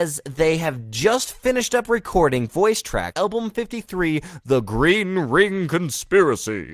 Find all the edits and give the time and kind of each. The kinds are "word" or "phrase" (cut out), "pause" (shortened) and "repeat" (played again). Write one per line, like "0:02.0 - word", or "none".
0:03.1 - word